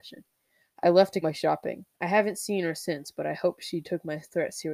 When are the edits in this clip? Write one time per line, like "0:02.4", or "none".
0:01.2
0:01.9